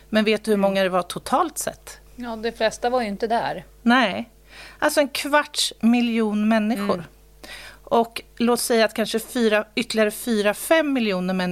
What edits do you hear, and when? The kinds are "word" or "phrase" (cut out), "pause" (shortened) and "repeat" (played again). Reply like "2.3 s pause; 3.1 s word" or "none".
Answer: 2.1 s pause